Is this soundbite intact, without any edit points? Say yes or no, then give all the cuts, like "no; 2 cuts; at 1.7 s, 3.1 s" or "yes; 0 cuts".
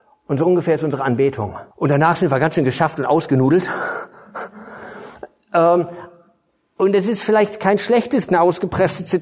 no; 2 cuts; at 1.7 s, 8.3 s